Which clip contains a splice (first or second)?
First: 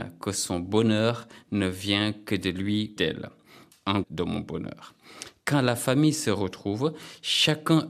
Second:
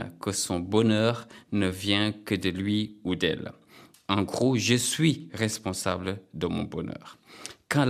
first